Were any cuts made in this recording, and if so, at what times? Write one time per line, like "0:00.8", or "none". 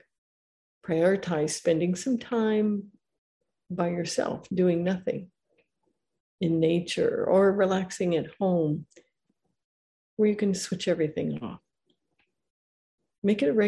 none